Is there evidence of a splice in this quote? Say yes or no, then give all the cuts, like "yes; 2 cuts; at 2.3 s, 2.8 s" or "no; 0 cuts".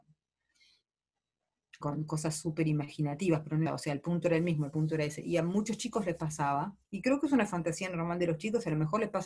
yes; 3 cuts; at 1.8 s, 3.7 s, 6.8 s